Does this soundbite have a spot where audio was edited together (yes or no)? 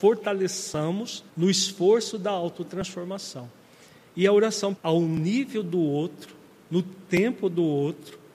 yes